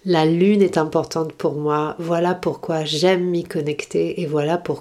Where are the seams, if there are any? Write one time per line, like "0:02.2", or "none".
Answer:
none